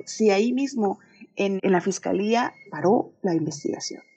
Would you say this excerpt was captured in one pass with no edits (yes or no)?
no